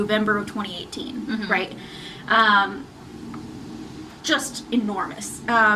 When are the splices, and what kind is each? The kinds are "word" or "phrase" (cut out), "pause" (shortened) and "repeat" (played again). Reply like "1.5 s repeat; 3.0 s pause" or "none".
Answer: 4.2 s phrase